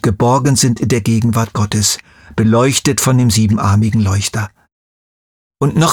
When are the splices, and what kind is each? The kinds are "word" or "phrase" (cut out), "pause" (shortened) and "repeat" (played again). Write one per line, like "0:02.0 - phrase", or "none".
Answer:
none